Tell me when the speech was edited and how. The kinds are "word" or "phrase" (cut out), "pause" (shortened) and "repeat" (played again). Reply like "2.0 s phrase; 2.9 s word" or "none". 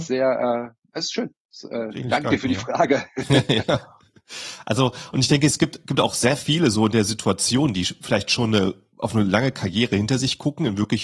none